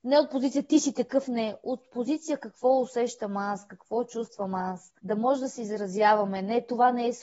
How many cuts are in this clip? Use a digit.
1